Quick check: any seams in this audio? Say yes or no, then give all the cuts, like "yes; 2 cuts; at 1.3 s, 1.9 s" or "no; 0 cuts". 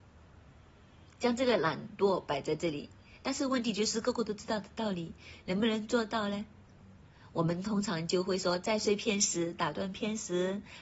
no; 0 cuts